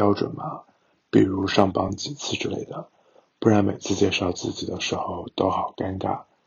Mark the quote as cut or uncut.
uncut